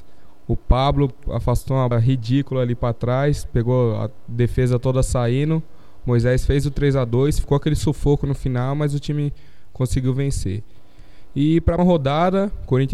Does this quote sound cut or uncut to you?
cut